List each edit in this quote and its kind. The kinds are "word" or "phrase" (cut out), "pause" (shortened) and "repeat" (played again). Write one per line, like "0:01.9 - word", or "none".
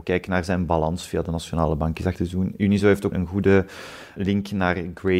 0:02.1 - word
0:03.1 - word